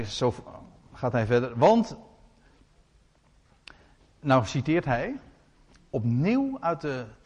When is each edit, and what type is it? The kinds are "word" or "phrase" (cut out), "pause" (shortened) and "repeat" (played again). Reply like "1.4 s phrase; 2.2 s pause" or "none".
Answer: none